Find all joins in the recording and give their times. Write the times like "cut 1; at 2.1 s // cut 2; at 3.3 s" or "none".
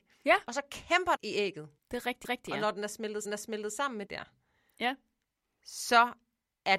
cut 1; at 1.2 s // cut 2; at 1.8 s // cut 3; at 2.2 s // cut 4; at 3.2 s // cut 5; at 4.1 s